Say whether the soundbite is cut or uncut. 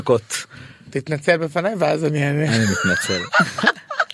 uncut